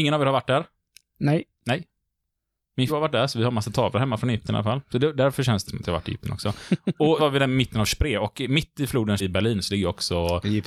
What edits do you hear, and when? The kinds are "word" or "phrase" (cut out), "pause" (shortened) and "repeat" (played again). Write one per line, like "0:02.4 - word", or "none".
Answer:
0:02.9 - word
0:05.6 - word
0:07.2 - word
0:09.2 - word